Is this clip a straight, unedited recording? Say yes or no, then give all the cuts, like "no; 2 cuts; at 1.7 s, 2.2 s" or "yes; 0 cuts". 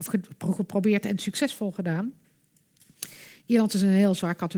yes; 0 cuts